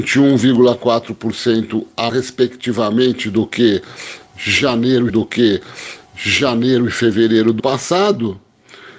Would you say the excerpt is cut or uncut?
cut